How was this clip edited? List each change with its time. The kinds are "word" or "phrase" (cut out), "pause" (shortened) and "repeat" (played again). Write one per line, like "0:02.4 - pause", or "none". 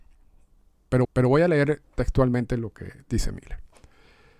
0:01.0 - repeat
0:01.8 - pause